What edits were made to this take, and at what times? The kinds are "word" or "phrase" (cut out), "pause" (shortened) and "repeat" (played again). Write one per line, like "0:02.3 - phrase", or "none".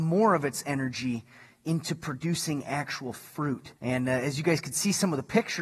0:03.8 - pause

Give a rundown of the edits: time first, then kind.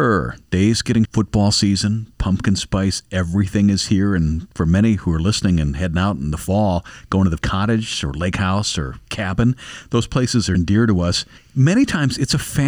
0:01.0 - word
0:07.4 - word
0:10.5 - word

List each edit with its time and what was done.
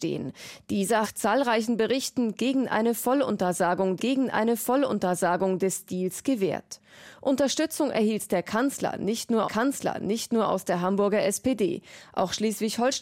0:01.0 - phrase
0:04.0 - repeat
0:09.4 - repeat

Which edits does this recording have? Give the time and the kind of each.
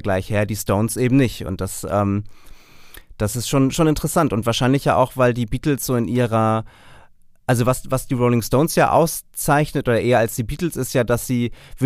none

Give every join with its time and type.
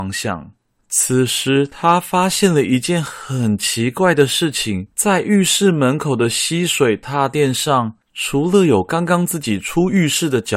0:04.9 - pause
0:08.0 - pause

